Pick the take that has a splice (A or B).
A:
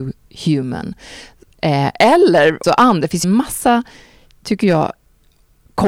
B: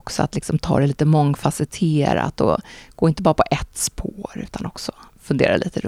A